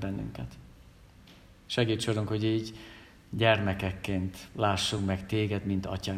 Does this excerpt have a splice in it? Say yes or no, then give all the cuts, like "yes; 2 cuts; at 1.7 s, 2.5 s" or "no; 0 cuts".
no; 0 cuts